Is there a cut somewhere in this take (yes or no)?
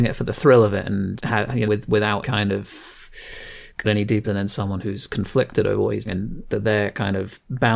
yes